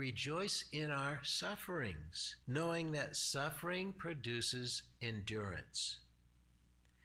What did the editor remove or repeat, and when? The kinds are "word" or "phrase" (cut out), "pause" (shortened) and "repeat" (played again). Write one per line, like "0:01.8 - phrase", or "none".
0:02.4 - pause